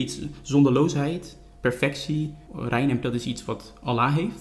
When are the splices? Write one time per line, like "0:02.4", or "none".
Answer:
0:02.5
0:03.0